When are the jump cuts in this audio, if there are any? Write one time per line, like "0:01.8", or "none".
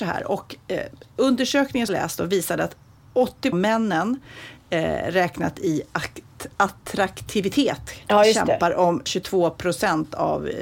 0:01.9
0:03.5
0:09.1

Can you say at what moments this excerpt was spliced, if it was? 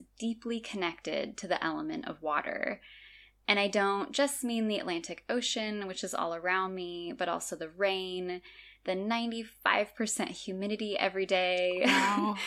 none

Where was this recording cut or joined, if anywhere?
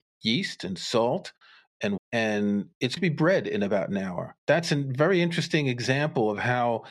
0:02.0
0:03.0
0:04.4

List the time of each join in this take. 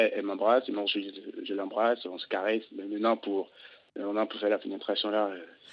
0:02.7

